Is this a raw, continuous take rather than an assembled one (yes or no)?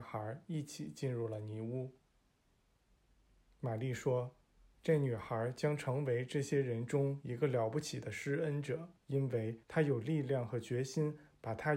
no